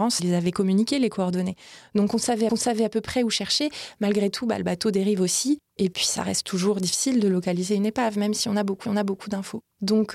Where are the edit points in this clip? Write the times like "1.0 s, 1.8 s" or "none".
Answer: 2.5 s, 8.8 s